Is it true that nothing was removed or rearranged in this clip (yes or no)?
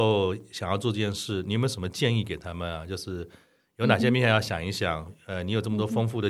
yes